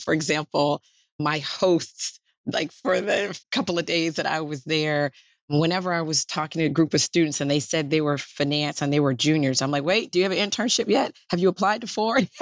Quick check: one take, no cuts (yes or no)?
yes